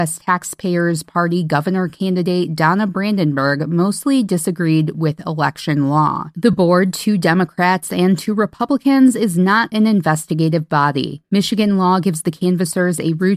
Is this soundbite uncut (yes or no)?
yes